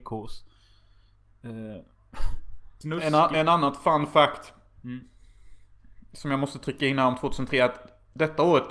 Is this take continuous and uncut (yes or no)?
yes